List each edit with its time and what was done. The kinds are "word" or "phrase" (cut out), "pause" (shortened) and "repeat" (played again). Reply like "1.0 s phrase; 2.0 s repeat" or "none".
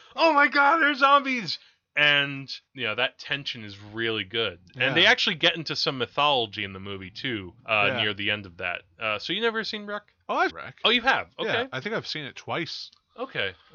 2.7 s pause; 7.6 s pause; 10.5 s word